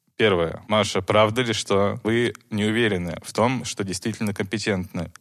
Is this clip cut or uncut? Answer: uncut